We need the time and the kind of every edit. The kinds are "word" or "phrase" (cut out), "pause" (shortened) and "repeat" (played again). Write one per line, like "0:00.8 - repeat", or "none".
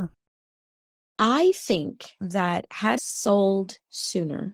0:03.0 - word